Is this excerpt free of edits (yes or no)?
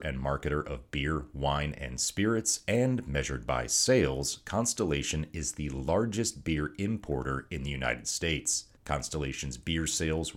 no